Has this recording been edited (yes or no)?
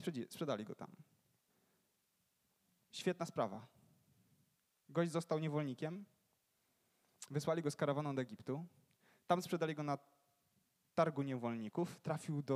no